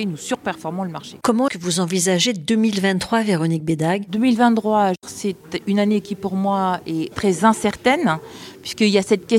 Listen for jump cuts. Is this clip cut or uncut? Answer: cut